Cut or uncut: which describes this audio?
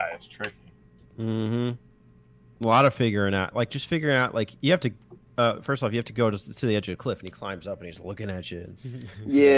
uncut